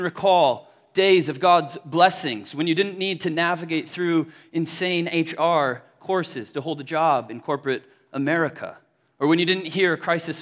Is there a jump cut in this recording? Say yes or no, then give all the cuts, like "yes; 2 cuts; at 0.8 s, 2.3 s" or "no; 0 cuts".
no; 0 cuts